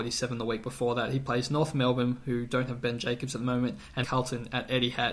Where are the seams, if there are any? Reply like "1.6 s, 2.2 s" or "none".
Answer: 4.0 s